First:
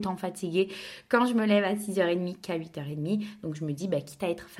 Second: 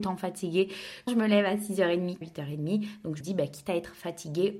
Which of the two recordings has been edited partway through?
second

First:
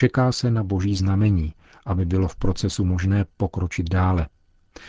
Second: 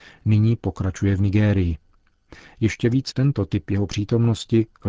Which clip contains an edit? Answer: second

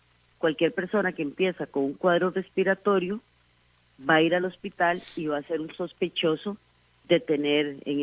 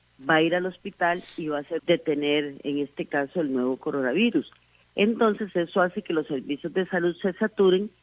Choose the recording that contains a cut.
second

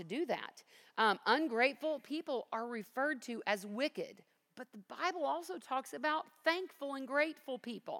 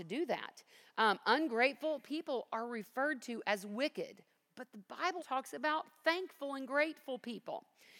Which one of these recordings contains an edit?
second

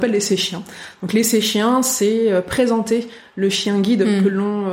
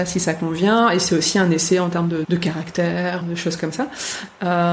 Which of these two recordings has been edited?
second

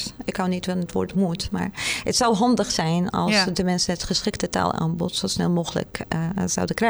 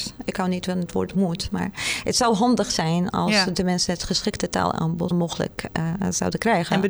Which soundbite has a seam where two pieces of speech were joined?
second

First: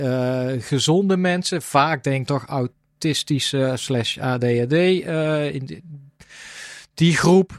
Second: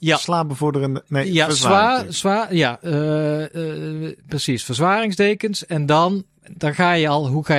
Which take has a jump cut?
first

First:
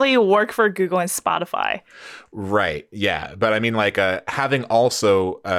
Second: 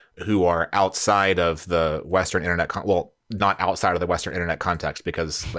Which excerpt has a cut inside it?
second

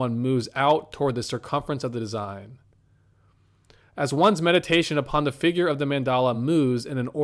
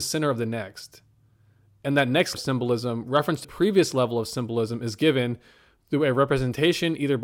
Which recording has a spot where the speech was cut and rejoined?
second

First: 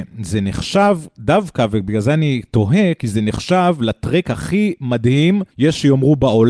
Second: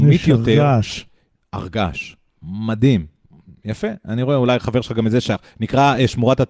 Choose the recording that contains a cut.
first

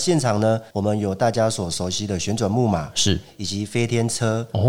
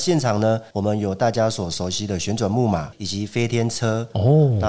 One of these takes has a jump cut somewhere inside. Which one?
second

